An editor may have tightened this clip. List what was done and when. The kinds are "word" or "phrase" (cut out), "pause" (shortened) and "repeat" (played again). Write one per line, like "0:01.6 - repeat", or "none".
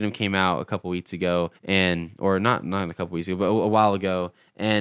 0:01.6 - pause

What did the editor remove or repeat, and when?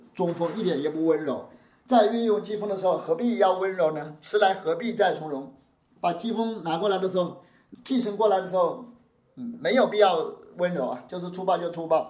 0:07.7 - word

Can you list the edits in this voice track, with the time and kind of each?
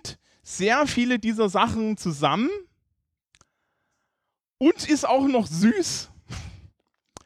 none

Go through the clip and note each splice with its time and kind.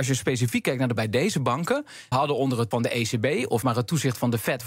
0:01.0 - word
0:02.1 - word
0:02.7 - word
0:03.6 - word

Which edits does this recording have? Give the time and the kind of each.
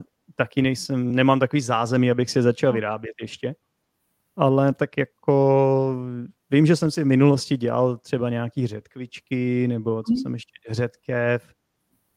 none

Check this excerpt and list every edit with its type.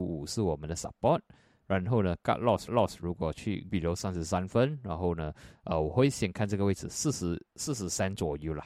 0:02.7 - repeat
0:03.7 - word

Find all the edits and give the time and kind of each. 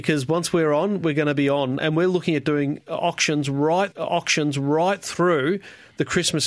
0:01.8 - word
0:03.9 - repeat

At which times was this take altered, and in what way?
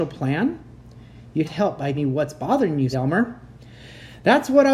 0:01.4 - word
0:01.9 - word
0:02.9 - word

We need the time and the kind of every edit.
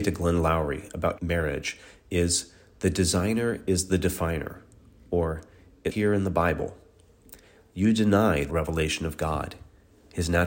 0:01.2 - word
0:05.9 - word
0:08.5 - word

